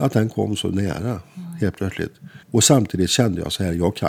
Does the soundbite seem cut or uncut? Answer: cut